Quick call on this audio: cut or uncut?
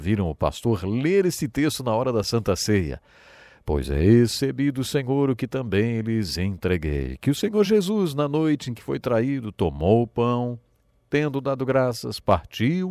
uncut